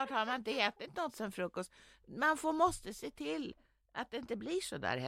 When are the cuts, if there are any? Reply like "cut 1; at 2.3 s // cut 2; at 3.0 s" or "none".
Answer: none